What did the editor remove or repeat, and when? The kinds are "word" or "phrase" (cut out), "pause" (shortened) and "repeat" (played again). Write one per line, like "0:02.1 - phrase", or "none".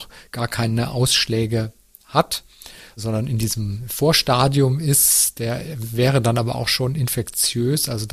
none